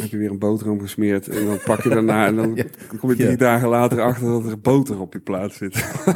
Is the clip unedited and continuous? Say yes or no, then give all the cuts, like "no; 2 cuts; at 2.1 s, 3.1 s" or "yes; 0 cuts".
yes; 0 cuts